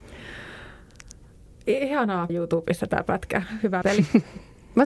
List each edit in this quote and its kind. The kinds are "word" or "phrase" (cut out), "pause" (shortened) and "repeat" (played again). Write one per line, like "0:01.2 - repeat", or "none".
0:02.3 - phrase
0:03.8 - word